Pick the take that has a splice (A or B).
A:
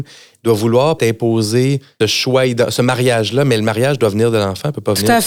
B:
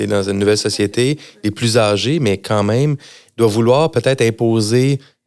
A